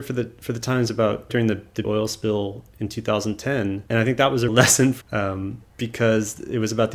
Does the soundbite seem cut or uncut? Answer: cut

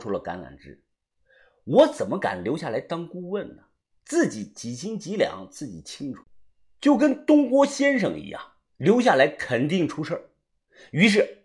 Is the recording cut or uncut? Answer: uncut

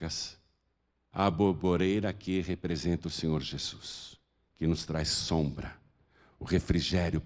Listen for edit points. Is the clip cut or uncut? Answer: uncut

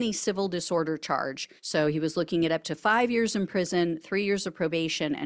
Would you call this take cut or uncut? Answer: cut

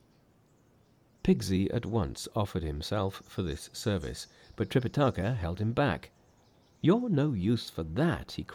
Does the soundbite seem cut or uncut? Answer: uncut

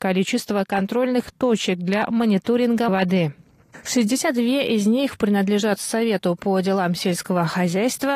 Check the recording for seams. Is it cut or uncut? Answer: cut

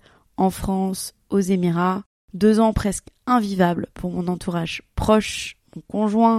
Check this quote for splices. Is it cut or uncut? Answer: uncut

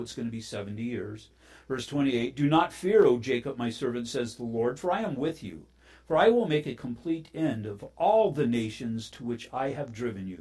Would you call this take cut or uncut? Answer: uncut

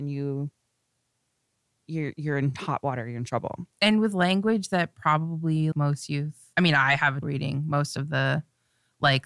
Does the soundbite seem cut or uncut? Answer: cut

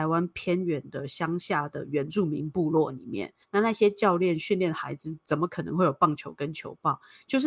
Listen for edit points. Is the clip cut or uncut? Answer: cut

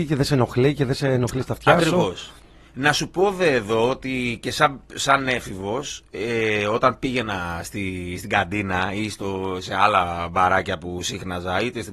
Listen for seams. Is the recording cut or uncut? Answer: uncut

